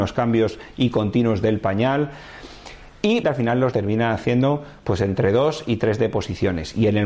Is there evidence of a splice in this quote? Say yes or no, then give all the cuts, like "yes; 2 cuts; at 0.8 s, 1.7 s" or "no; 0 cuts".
yes; 2 cuts; at 3.2 s, 3.7 s